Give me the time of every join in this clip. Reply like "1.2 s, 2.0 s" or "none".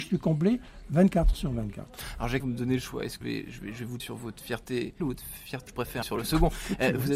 1.3 s, 2.4 s, 3.2 s, 4.0 s, 5.0 s, 5.7 s, 6.0 s